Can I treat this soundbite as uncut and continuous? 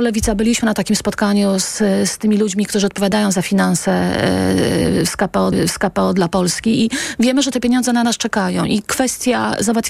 no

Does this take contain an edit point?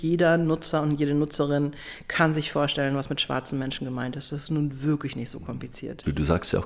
no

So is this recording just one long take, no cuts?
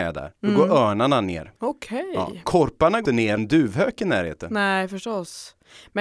no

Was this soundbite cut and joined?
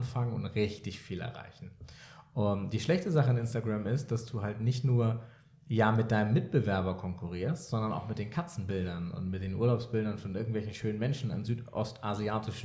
no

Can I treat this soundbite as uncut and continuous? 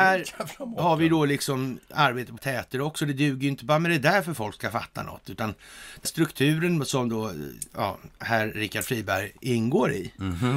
no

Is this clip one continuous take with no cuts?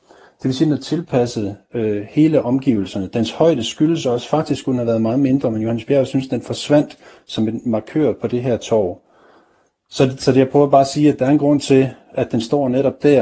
yes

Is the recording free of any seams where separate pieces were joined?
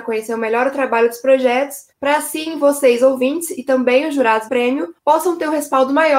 no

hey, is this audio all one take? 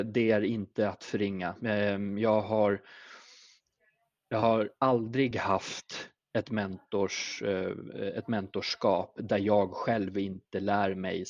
yes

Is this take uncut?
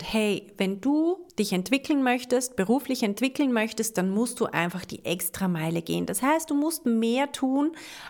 no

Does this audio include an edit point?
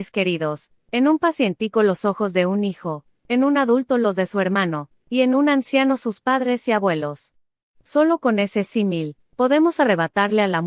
no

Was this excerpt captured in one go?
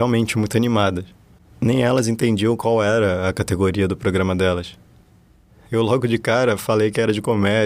yes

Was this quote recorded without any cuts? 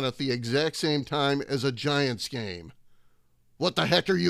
yes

